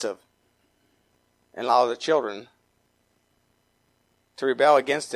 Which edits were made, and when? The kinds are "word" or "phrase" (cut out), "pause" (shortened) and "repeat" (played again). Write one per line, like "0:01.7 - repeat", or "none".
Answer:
none